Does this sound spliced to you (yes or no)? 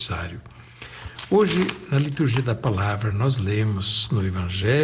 no